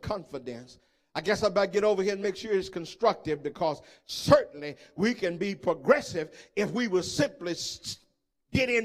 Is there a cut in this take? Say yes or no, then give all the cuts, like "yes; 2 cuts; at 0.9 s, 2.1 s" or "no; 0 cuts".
no; 0 cuts